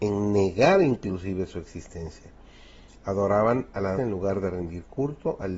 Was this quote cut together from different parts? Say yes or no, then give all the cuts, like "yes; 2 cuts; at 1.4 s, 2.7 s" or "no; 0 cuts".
yes; 1 cut; at 3.9 s